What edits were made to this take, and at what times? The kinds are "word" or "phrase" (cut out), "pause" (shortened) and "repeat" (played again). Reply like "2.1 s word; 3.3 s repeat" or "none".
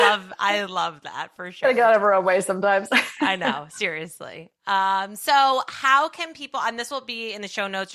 none